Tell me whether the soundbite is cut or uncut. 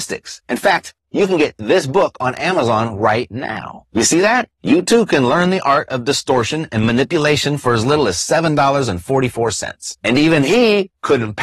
uncut